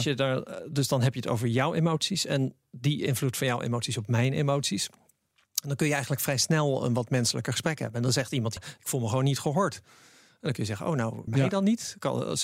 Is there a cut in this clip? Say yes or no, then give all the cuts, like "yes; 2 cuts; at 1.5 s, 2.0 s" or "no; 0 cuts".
yes; 2 cuts; at 8.6 s, 11.3 s